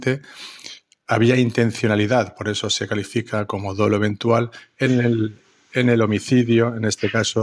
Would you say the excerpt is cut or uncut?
uncut